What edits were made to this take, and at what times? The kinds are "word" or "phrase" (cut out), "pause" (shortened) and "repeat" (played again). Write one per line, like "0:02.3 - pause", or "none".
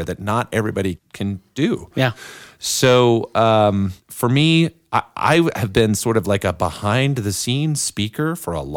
0:01.0 - word
0:04.0 - pause